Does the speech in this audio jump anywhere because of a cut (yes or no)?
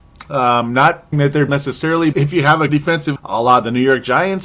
yes